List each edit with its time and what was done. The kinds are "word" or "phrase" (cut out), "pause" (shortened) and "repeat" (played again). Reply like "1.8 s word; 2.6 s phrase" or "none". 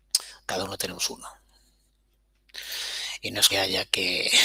3.5 s word